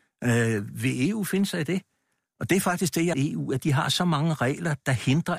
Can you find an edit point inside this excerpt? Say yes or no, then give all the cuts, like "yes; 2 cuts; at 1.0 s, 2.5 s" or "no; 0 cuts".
yes; 1 cut; at 3.1 s